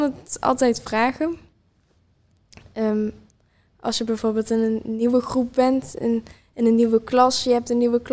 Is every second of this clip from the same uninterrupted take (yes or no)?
yes